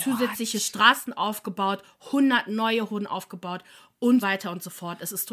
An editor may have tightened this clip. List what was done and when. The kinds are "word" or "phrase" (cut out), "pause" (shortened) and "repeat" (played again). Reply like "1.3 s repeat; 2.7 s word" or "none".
2.9 s word; 4.2 s word